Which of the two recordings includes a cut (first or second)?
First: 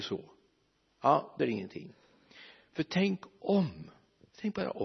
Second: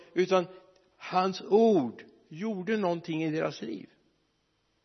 first